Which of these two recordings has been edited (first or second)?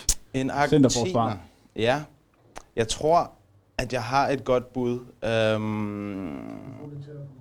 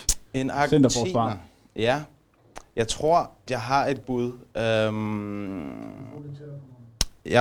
second